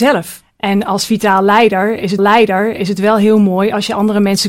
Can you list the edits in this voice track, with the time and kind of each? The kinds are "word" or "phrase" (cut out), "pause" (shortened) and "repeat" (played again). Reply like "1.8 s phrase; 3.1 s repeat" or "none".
2.2 s repeat